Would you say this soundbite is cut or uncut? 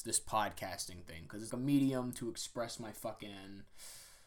cut